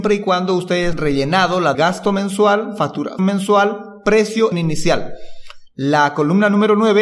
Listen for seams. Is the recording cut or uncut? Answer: cut